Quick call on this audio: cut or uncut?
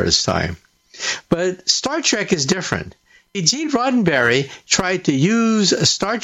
cut